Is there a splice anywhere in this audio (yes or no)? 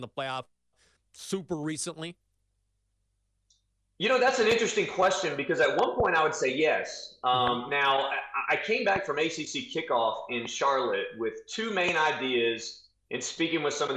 no